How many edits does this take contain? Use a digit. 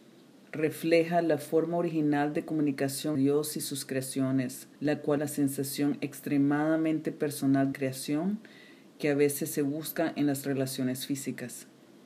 4